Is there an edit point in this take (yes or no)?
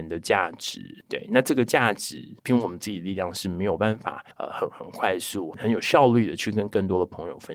yes